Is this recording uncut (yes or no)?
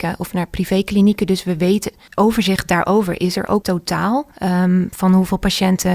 no